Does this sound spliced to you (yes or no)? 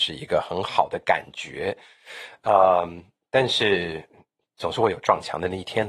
no